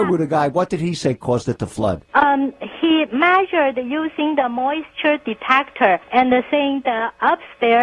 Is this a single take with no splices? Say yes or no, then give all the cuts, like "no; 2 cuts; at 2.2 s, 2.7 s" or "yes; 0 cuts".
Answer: no; 2 cuts; at 2.1 s, 6.0 s